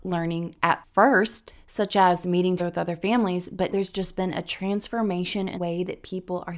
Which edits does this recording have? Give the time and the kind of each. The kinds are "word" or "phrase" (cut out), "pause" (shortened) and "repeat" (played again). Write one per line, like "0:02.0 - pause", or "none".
0:02.6 - word
0:03.7 - word
0:05.6 - word